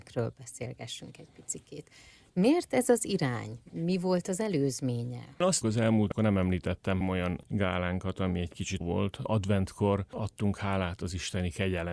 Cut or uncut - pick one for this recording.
cut